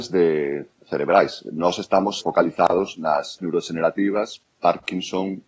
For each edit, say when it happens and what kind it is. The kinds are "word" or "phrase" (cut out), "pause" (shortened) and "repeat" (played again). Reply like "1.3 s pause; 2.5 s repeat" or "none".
2.2 s word; 3.4 s word; 4.5 s pause